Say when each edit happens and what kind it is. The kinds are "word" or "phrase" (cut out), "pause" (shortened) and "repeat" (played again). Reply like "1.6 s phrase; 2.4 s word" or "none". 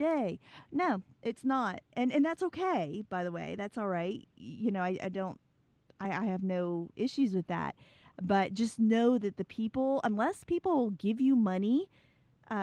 none